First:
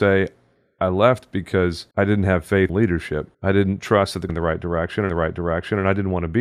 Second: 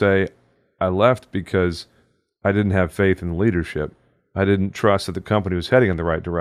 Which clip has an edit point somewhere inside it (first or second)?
first